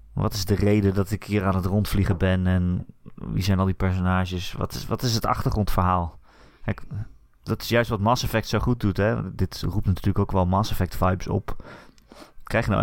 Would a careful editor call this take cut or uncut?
uncut